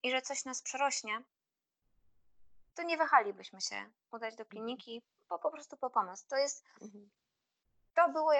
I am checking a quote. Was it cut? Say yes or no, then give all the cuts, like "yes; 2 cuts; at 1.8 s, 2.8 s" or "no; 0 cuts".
no; 0 cuts